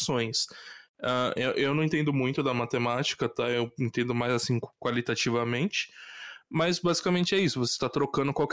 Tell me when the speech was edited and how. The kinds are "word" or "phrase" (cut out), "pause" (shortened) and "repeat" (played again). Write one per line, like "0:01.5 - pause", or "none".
none